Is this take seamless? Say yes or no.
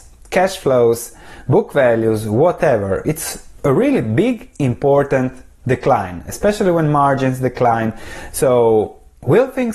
yes